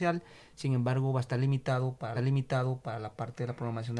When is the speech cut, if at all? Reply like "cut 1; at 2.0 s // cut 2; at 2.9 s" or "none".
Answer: cut 1; at 2.2 s